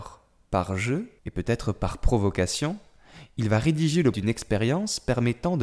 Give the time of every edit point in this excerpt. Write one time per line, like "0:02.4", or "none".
0:01.2
0:04.1